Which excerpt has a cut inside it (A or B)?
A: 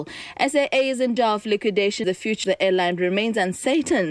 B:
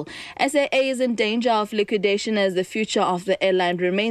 A